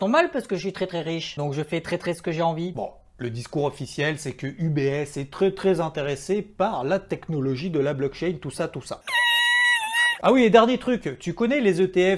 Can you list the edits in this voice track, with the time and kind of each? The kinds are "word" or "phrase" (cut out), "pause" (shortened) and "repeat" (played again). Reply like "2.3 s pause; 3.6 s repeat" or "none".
none